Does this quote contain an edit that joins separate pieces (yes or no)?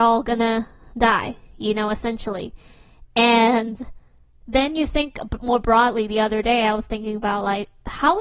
no